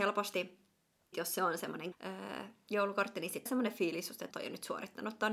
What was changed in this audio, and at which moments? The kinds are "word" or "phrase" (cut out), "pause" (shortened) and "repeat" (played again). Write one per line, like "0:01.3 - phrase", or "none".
0:01.1 - word
0:01.9 - word
0:03.5 - word
0:04.3 - word